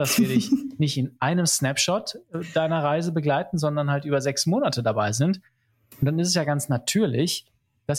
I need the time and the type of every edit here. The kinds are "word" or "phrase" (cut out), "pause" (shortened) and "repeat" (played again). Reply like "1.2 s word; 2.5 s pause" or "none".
none